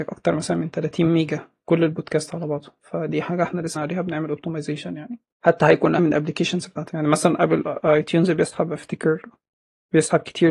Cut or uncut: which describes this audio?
cut